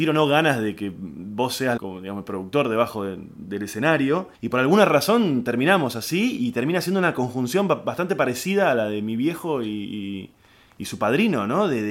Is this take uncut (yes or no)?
no